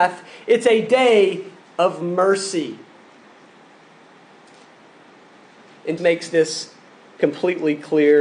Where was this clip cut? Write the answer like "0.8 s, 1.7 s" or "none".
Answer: 6.0 s

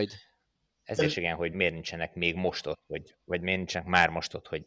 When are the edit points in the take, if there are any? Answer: 1.0 s, 1.5 s

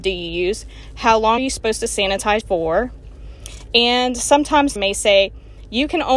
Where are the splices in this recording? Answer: 1.4 s, 2.4 s, 4.8 s

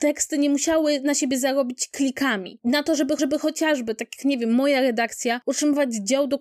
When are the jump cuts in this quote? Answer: 3.2 s

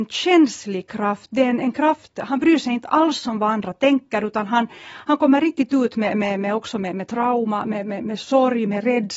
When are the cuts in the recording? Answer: none

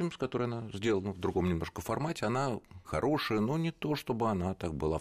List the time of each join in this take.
2.8 s

